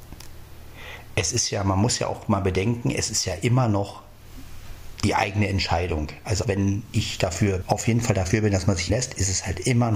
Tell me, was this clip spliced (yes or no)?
yes